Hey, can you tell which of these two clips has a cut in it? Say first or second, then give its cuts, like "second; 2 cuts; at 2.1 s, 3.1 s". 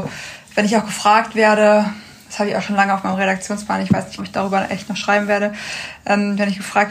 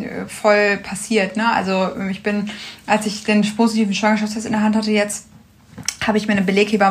first; 1 cut; at 4.2 s